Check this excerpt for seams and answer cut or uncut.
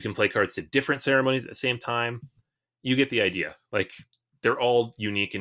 uncut